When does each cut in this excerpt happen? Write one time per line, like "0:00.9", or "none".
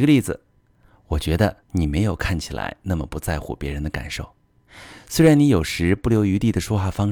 0:01.6